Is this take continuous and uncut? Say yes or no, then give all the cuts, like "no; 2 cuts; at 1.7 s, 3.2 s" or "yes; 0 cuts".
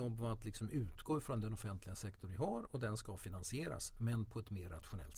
yes; 0 cuts